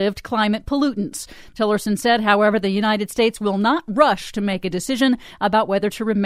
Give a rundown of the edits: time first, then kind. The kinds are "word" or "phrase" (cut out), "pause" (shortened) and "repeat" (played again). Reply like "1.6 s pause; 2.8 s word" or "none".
none